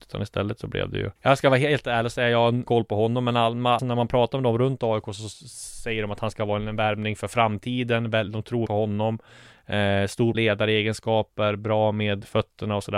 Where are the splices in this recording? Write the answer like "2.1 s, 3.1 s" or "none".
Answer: 1.2 s, 2.7 s, 3.8 s, 8.7 s, 10.3 s

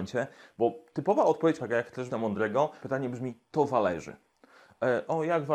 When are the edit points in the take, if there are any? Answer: 1.6 s, 2.1 s, 2.8 s

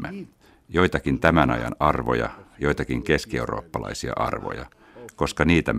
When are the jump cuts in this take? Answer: none

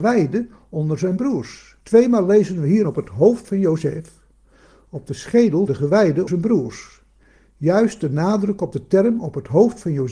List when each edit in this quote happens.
1.8 s, 2.8 s, 5.7 s, 6.3 s

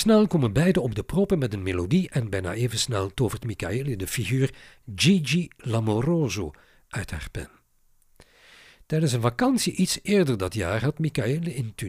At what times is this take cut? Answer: none

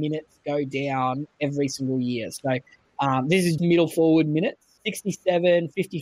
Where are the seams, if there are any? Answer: 3.6 s

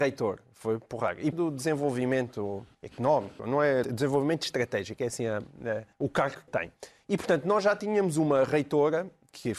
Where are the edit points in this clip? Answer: 1.3 s, 2.7 s, 3.8 s, 5.9 s, 6.5 s

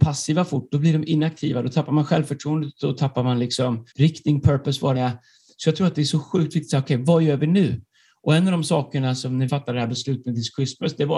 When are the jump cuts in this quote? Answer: 3.9 s, 4.9 s, 9.5 s

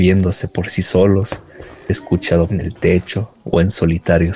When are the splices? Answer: 1.9 s, 2.5 s

